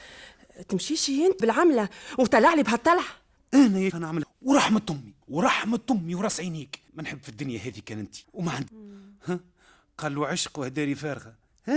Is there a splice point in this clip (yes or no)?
yes